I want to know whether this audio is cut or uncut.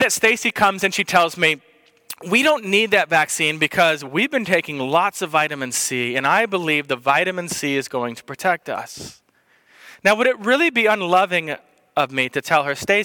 uncut